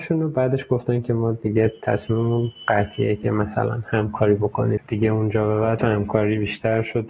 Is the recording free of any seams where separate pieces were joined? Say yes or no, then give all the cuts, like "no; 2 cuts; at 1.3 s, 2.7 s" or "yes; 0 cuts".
no; 1 cut; at 5.8 s